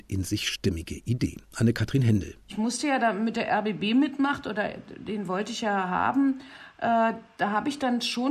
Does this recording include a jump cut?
no; 0 cuts

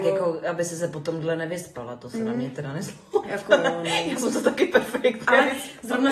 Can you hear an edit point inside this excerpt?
no; 0 cuts

